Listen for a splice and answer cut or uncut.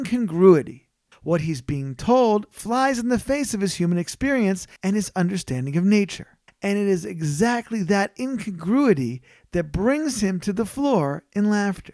cut